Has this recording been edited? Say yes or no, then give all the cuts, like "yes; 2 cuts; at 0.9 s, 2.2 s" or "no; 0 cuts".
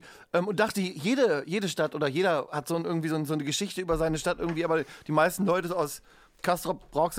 no; 0 cuts